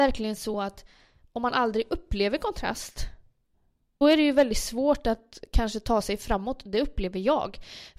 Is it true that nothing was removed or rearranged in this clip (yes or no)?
no